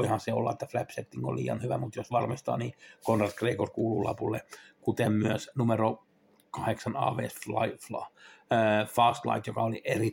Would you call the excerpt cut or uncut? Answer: uncut